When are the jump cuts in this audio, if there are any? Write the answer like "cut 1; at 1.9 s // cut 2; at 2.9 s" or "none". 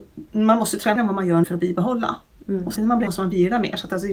cut 1; at 1.0 s // cut 2; at 1.4 s // cut 3; at 2.8 s // cut 4; at 3.1 s